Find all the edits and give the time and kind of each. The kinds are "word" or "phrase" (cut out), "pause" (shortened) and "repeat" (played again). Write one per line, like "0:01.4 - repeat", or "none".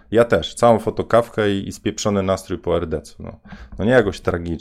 none